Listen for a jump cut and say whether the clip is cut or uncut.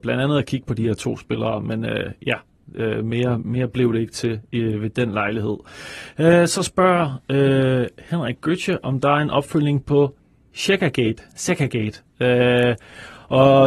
uncut